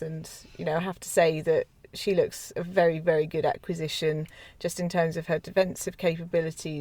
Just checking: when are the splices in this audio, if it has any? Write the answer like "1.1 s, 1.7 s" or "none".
none